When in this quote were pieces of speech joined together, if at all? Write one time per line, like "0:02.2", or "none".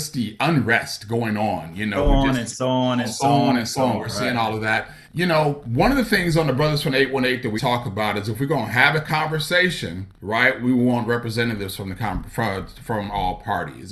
0:05.0
0:07.6
0:10.1